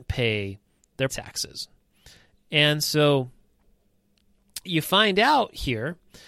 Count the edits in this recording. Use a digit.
2